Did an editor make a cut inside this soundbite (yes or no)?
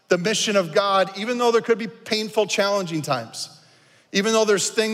no